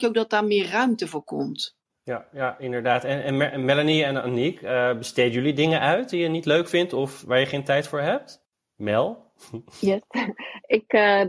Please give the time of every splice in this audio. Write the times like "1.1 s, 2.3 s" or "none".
none